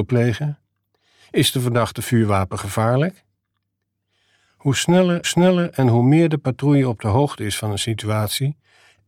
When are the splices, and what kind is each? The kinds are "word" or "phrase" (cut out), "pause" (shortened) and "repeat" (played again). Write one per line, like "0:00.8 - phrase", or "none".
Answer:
0:05.2 - repeat